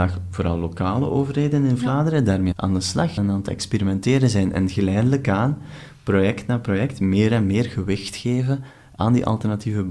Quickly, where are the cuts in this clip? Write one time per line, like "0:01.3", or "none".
0:02.5
0:03.2